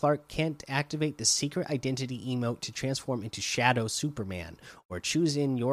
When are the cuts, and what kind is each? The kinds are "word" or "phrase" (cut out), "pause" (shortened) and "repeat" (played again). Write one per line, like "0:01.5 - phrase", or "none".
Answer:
none

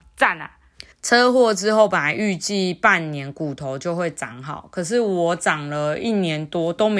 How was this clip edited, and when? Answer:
0:00.9 - pause

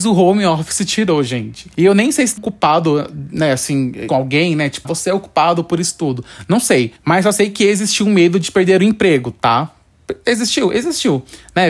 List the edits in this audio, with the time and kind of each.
0:02.4 - word
0:04.1 - word
0:04.8 - word
0:07.0 - pause

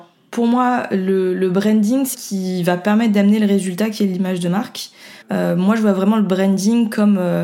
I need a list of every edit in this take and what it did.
0:02.1 - phrase
0:05.2 - pause

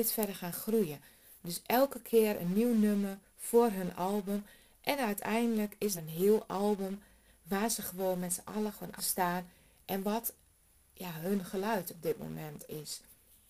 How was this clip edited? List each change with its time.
0:06.0 - word
0:09.0 - word

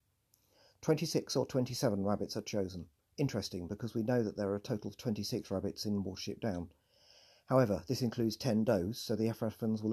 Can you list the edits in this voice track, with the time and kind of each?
none

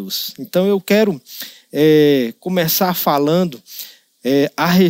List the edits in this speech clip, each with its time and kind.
none

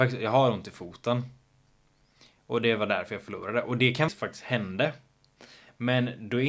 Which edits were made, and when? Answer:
0:04.1 - phrase

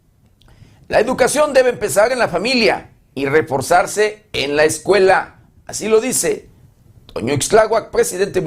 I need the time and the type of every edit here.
none

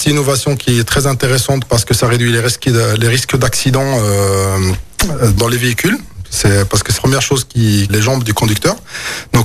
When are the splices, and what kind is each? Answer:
0:05.4 - word
0:07.0 - word
0:07.9 - phrase

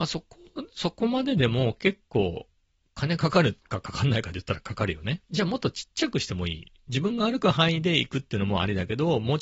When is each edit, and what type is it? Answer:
0:03.6 - pause
0:05.2 - pause

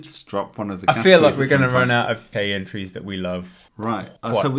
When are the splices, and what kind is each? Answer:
0:02.3 - word

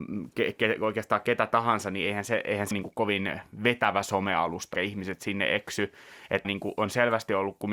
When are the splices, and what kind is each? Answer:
0:02.7 - word
0:04.7 - word
0:06.4 - word

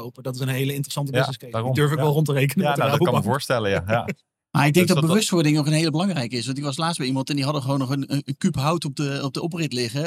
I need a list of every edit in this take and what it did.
none

